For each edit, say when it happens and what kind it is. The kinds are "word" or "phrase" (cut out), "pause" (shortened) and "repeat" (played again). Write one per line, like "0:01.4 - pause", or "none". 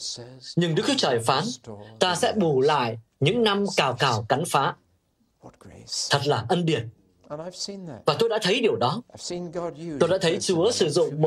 none

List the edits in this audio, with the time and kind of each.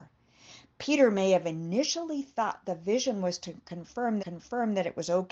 0:04.2 - repeat

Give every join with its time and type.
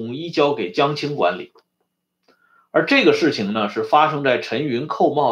none

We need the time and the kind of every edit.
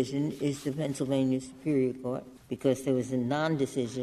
0:02.4 - pause

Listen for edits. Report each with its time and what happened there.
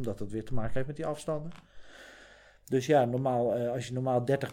none

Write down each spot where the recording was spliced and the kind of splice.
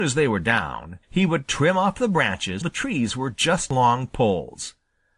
0:01.0 - pause
0:02.6 - word

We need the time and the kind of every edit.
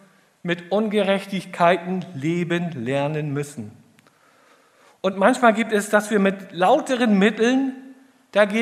none

